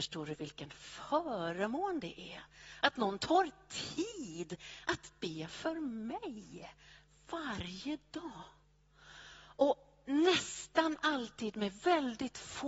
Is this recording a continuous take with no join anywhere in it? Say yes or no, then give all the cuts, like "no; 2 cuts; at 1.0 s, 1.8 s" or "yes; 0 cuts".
yes; 0 cuts